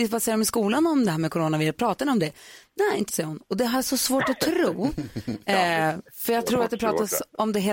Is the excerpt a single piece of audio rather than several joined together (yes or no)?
no